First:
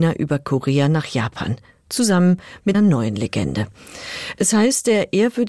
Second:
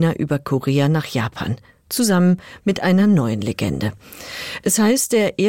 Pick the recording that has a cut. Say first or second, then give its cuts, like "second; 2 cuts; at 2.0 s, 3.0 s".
first; 1 cut; at 2.7 s